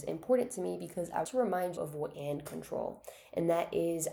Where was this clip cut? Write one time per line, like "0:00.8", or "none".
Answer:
0:01.2
0:01.8
0:02.1